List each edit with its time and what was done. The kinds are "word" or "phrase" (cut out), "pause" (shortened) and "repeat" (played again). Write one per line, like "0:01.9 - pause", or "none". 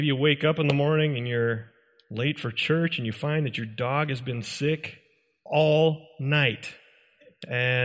none